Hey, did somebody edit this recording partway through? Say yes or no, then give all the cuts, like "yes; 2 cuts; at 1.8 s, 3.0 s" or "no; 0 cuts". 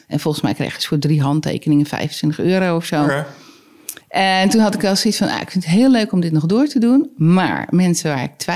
yes; 1 cut; at 4.0 s